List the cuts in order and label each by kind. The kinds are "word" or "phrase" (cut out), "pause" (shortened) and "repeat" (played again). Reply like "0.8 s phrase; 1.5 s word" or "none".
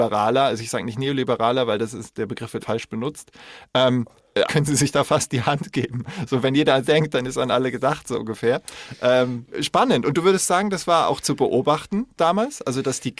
2.6 s word; 4.5 s word; 6.8 s word; 9.5 s word